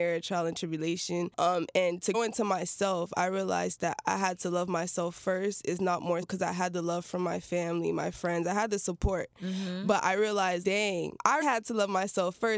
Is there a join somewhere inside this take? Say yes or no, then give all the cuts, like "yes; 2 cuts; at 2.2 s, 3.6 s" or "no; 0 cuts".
yes; 4 cuts; at 2.1 s, 6.2 s, 10.6 s, 11.4 s